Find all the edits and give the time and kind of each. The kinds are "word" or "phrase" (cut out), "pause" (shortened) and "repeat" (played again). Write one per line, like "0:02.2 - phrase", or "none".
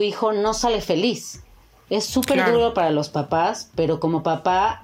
none